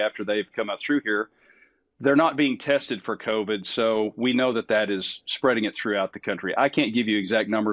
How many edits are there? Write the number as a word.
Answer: zero